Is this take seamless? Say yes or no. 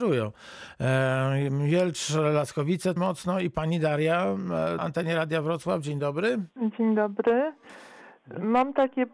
no